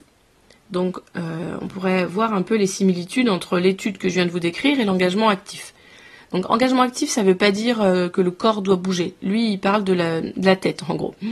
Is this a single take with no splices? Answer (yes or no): yes